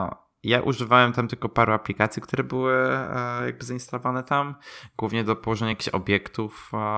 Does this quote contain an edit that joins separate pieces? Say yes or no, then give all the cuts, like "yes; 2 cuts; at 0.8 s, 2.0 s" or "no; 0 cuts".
no; 0 cuts